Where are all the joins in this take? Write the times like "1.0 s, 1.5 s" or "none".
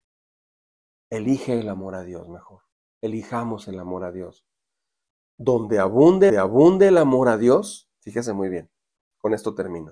2.7 s, 6.3 s